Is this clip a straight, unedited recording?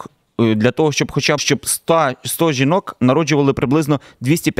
no; 1 cut; at 1.4 s

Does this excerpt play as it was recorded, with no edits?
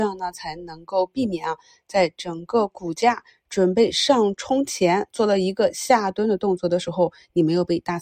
yes; 0 cuts

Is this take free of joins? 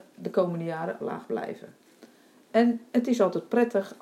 no; 2 cuts; at 1.0 s, 2.9 s

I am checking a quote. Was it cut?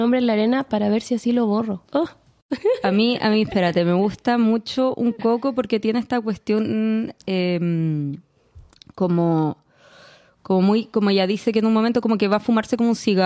yes; 1 cut; at 1.8 s

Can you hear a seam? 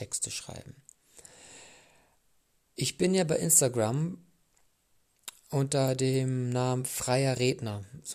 no; 0 cuts

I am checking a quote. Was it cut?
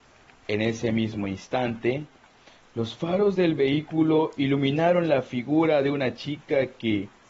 no; 0 cuts

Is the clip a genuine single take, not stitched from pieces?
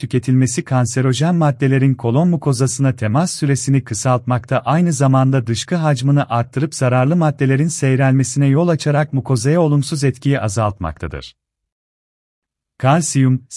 yes; 0 cuts

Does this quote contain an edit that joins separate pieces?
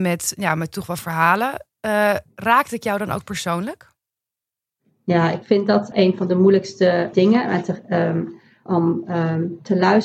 yes; 4 cuts; at 1.0 s, 5.9 s, 7.1 s, 8.7 s

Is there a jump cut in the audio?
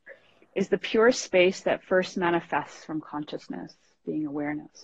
no; 0 cuts

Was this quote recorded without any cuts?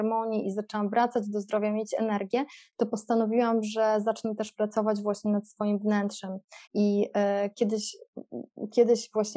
no; 1 cut; at 6.6 s

